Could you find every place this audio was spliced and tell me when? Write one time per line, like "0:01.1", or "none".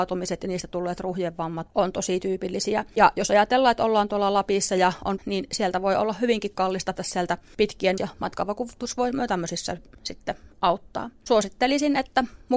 0:01.7
0:05.2
0:07.0
0:08.0